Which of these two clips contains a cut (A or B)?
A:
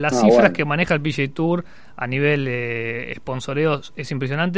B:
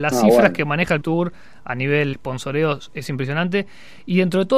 B